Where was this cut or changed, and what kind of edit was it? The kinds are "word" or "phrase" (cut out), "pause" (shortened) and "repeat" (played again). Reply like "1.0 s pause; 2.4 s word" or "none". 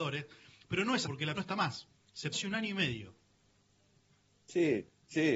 1.0 s word; 1.3 s word; 2.3 s word